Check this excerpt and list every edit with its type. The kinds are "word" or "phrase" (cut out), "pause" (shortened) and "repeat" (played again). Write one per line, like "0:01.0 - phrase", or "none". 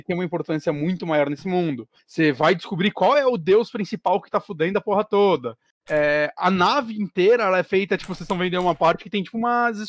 none